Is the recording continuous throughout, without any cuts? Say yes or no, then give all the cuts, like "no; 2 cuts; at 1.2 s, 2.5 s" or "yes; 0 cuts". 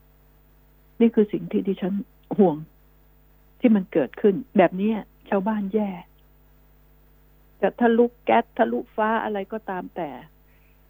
no; 1 cut; at 4.5 s